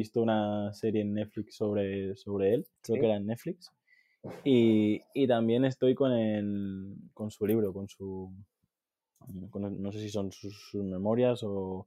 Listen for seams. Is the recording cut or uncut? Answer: cut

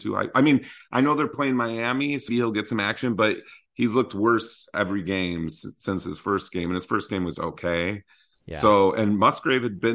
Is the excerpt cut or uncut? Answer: cut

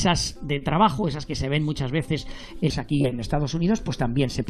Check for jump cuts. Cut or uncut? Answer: cut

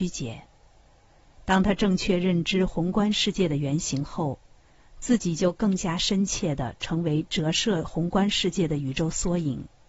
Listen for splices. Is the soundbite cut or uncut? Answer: uncut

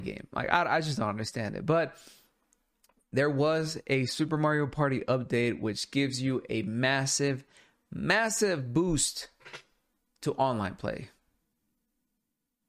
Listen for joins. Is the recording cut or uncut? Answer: uncut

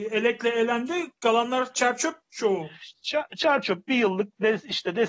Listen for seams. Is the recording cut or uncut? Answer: uncut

